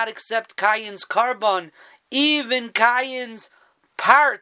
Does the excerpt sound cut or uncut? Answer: uncut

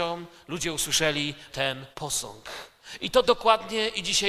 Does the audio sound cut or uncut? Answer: cut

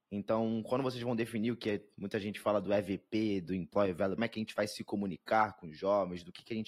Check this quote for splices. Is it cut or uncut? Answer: cut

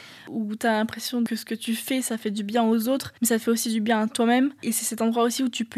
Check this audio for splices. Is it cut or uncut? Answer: cut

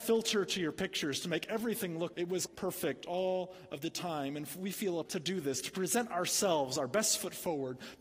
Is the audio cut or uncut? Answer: cut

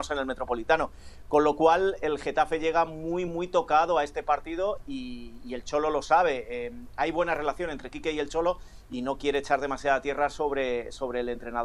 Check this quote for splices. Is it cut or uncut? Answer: uncut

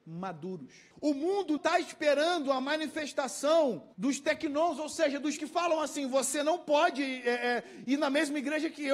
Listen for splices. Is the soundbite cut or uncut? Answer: cut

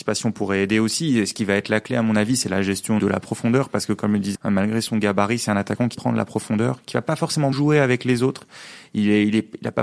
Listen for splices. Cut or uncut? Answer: cut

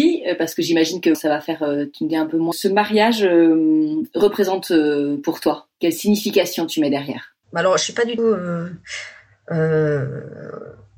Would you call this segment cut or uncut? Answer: cut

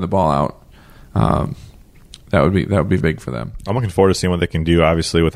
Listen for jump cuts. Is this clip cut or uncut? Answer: cut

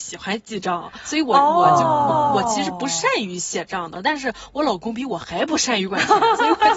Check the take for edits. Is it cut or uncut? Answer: cut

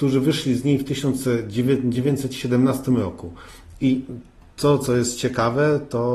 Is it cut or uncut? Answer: cut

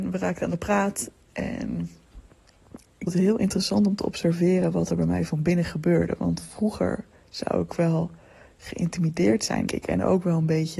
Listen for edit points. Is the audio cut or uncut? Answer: cut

